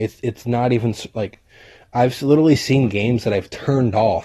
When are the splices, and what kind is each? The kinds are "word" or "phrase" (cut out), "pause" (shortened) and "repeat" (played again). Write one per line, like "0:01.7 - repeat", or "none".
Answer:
none